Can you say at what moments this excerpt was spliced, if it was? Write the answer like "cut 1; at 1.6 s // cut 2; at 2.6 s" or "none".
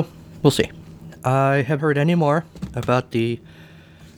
cut 1; at 1.8 s